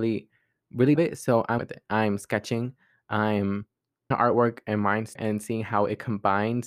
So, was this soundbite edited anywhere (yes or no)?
yes